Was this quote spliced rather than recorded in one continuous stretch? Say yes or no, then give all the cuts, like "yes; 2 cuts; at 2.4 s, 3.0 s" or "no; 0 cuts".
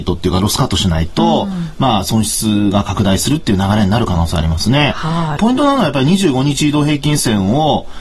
yes; 1 cut; at 5.4 s